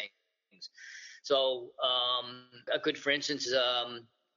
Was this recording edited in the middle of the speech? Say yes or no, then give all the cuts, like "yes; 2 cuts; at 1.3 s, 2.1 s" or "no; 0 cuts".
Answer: yes; 2 cuts; at 2.7 s, 3.5 s